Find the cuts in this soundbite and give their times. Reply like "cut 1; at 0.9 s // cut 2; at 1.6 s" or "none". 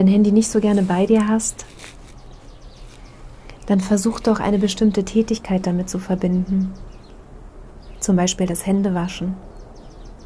none

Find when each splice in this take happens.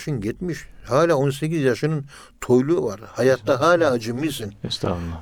none

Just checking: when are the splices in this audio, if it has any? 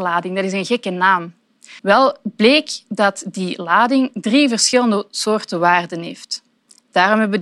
cut 1; at 1.8 s

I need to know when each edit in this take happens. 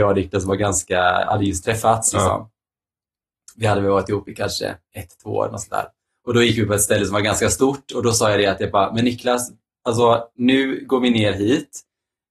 none

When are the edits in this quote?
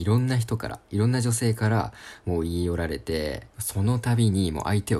cut 1; at 3.5 s

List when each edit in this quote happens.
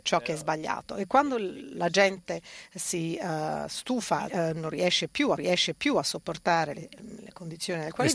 cut 1; at 4.3 s // cut 2; at 5.4 s

